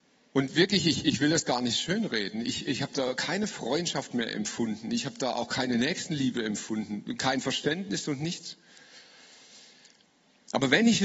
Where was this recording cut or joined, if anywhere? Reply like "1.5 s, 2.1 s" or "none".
none